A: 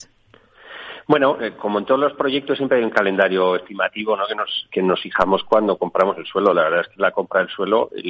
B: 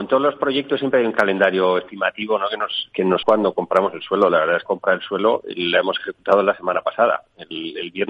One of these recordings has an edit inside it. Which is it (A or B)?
B